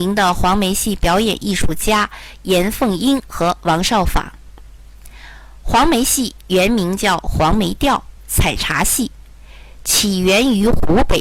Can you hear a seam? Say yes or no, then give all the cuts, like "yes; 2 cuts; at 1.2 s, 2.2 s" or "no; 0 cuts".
yes; 1 cut; at 8.2 s